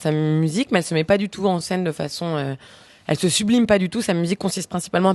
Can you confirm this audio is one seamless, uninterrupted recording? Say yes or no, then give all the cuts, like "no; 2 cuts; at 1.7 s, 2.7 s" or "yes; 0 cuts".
yes; 0 cuts